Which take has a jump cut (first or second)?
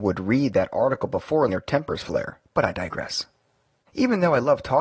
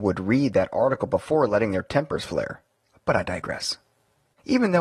first